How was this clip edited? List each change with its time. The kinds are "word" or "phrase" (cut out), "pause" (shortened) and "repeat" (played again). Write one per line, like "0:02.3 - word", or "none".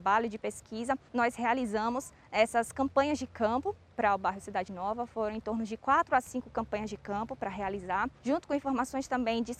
0:01.1 - pause
0:08.2 - pause